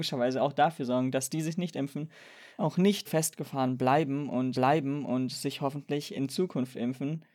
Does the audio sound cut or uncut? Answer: cut